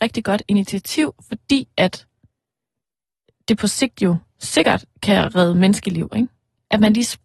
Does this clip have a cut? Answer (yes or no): no